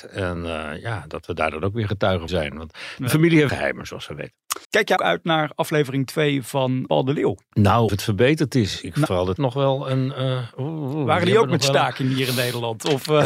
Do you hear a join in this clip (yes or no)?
yes